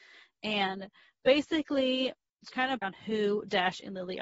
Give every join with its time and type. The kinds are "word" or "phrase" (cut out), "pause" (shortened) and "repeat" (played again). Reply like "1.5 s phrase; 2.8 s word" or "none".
2.5 s word; 2.8 s word